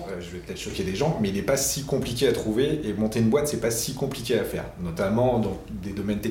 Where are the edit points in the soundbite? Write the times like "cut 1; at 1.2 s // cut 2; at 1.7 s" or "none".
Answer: none